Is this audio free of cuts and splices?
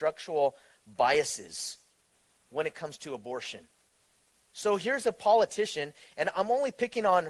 yes; 0 cuts

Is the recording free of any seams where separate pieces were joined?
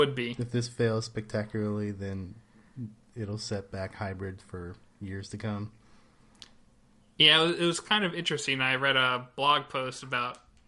yes; 0 cuts

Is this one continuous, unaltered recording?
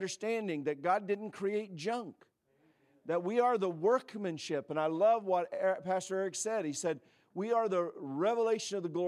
yes; 0 cuts

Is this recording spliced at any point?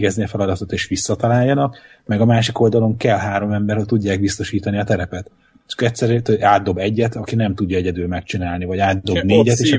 no; 0 cuts

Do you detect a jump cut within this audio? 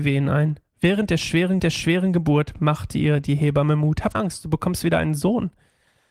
yes; 2 cuts; at 1.6 s, 4.1 s

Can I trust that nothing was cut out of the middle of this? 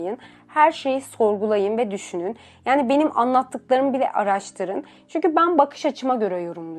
yes; 0 cuts

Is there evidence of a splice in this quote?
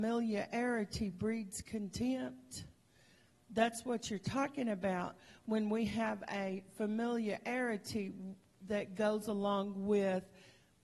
no; 0 cuts

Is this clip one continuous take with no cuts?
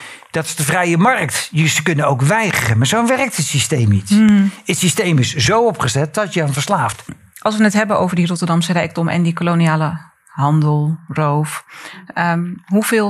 yes; 0 cuts

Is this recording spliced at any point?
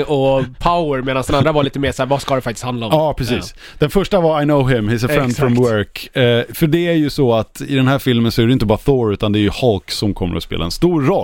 no; 0 cuts

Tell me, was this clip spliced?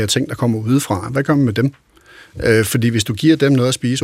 no; 0 cuts

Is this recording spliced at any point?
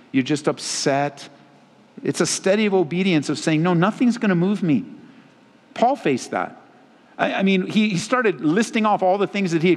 no; 0 cuts

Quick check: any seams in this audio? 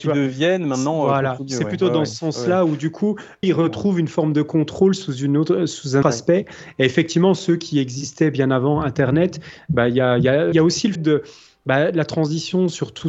yes; 5 cuts; at 1.4 s, 3.4 s, 6.0 s, 10.5 s, 11.0 s

